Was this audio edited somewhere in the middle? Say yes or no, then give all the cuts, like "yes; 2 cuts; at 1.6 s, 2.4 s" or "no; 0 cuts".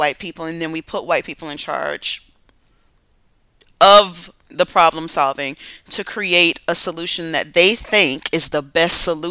no; 0 cuts